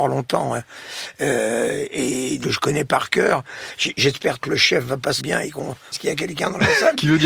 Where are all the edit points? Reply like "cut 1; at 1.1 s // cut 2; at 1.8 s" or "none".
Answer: cut 1; at 2.4 s // cut 2; at 4.4 s // cut 3; at 5.2 s // cut 4; at 5.9 s